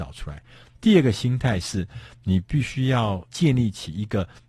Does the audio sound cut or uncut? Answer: cut